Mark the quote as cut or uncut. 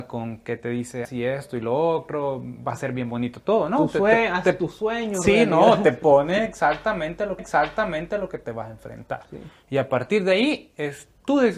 cut